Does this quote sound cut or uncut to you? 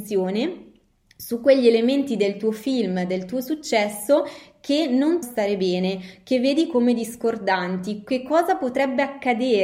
cut